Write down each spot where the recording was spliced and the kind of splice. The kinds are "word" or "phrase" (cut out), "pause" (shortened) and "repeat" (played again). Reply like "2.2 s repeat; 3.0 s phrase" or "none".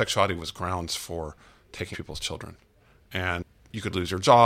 1.9 s word